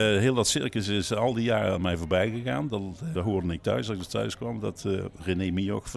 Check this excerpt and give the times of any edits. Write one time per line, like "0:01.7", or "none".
0:03.1